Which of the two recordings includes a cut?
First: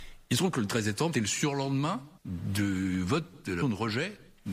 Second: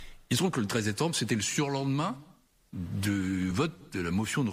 first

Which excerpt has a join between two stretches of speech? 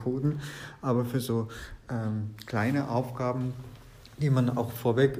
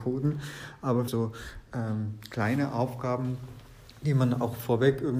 second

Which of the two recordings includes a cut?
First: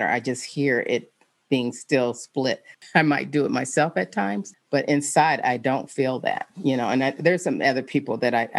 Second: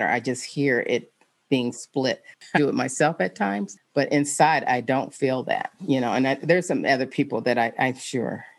second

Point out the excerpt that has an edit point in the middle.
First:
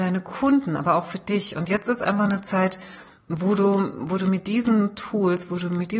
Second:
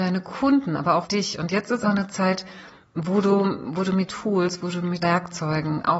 second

